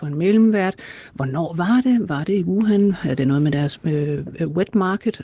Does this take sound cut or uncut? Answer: uncut